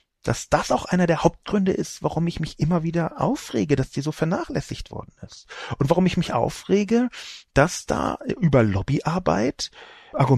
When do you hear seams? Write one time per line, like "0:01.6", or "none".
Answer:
none